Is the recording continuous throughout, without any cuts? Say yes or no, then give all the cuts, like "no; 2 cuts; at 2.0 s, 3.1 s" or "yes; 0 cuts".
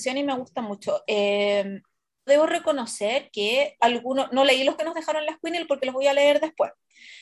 no; 3 cuts; at 2.3 s, 3.8 s, 4.8 s